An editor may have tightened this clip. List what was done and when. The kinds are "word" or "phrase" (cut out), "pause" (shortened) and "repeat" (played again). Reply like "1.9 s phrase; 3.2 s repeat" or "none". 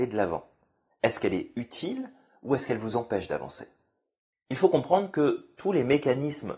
4.2 s pause